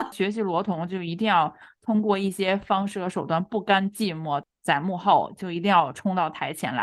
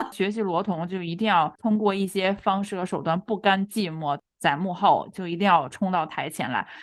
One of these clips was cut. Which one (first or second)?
second